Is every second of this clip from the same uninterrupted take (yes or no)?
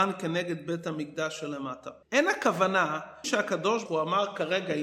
no